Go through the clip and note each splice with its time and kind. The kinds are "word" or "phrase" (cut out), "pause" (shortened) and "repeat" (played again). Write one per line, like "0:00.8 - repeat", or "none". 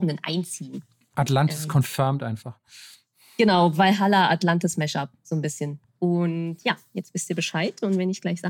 0:05.9 - pause